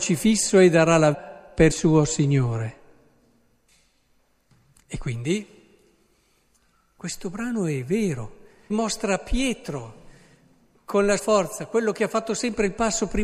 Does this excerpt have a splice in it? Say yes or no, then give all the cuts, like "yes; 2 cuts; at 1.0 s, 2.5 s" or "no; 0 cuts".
yes; 4 cuts; at 1.1 s, 1.7 s, 8.7 s, 11.2 s